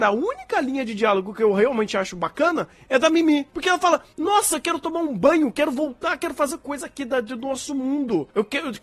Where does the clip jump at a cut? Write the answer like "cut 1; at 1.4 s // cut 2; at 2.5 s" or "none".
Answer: none